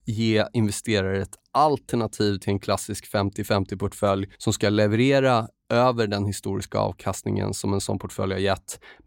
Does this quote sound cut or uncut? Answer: cut